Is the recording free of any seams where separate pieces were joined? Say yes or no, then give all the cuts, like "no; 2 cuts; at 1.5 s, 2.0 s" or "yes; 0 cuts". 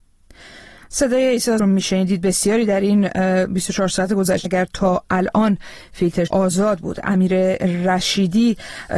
no; 3 cuts; at 1.6 s, 4.4 s, 6.3 s